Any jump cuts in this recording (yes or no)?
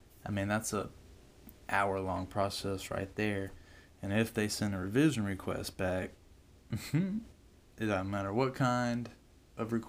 no